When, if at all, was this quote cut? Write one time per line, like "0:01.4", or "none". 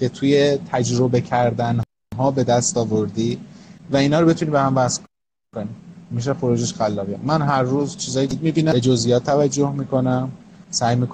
0:03.8